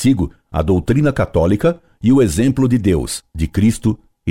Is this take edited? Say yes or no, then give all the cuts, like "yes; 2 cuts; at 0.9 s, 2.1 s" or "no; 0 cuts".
yes; 1 cut; at 3.3 s